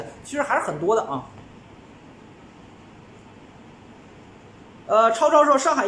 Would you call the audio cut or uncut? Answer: uncut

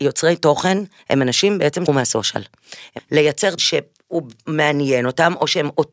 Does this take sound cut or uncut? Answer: cut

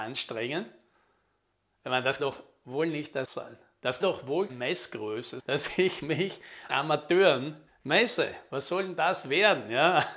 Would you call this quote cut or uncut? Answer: cut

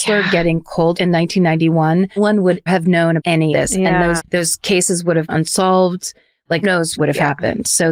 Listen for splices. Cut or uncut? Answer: cut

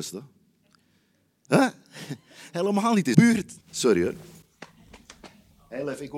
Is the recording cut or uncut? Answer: cut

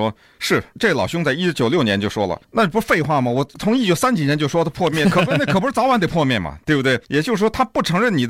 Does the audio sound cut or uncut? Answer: cut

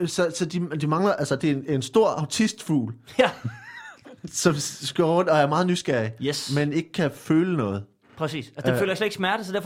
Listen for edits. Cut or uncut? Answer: uncut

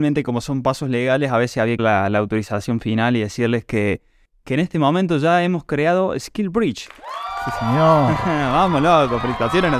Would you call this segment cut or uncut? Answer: cut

